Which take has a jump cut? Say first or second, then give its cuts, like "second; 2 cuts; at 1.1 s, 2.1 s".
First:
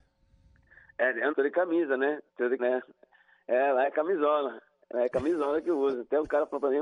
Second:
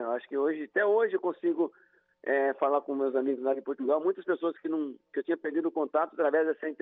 first; 3 cuts; at 1.3 s, 2.3 s, 2.6 s